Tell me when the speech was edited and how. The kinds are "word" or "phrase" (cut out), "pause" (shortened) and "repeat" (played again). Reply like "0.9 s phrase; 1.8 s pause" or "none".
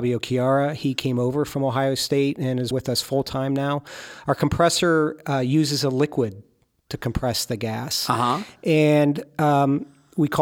2.7 s word